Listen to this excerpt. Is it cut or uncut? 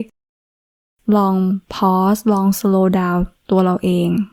cut